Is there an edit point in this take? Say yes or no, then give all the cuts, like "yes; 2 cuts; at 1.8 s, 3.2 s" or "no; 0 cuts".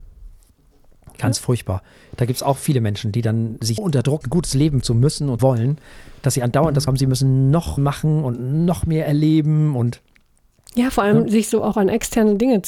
yes; 6 cuts; at 3.8 s, 4.2 s, 4.8 s, 5.4 s, 6.9 s, 7.8 s